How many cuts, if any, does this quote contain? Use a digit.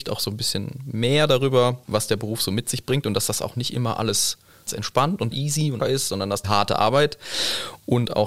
5